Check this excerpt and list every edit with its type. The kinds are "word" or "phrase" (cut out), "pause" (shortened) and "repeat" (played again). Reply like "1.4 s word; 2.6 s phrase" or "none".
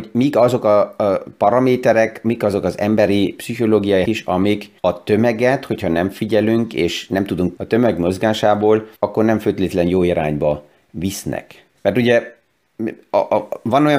4.1 s word; 4.8 s pause; 7.6 s word; 9.0 s pause; 11.8 s pause